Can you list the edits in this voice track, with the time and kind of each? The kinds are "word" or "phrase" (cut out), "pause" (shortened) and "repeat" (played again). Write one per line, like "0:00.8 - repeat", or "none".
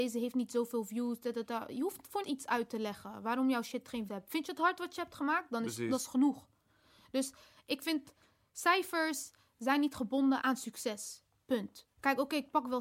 0:02.2 - word
0:04.1 - word
0:10.4 - word